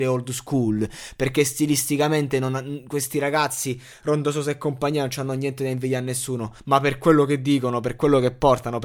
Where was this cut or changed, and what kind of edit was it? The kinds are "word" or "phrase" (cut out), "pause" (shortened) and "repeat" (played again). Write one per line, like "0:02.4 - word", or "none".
0:06.6 - pause

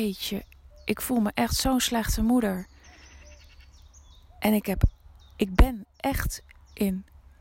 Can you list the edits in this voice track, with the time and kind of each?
none

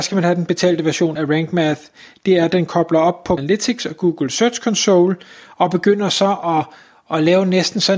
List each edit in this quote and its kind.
0:01.2 - word
0:03.4 - word

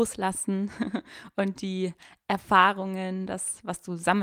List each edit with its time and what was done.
none

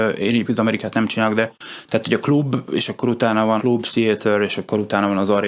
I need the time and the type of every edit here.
0:03.6 - word

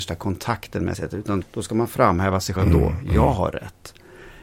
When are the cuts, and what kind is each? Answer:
0:00.9 - phrase
0:01.4 - word
0:02.6 - word

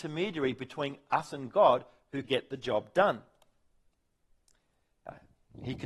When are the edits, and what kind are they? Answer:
0:02.2 - phrase

